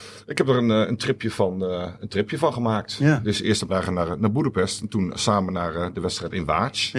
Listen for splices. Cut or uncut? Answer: cut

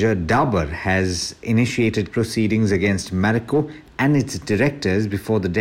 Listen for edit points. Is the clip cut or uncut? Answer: cut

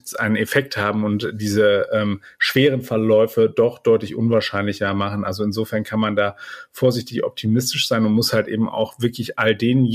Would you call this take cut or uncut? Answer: uncut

